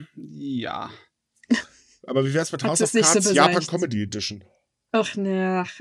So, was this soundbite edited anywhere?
no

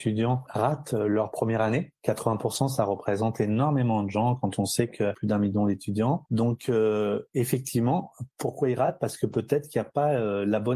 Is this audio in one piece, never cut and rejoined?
yes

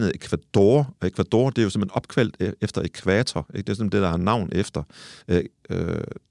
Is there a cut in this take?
yes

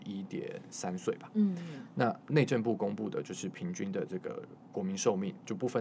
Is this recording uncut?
no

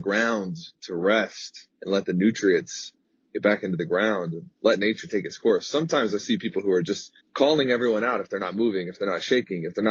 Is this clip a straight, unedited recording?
no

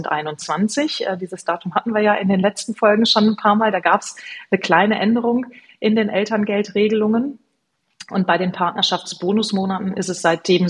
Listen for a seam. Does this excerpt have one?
no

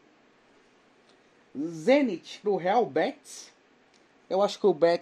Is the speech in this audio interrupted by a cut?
yes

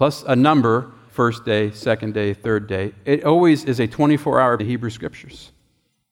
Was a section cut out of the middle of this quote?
yes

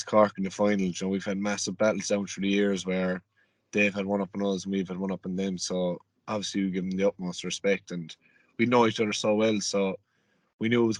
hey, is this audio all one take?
yes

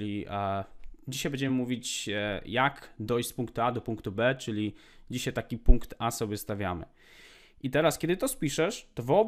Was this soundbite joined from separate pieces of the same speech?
no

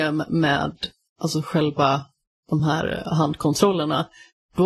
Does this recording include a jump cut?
no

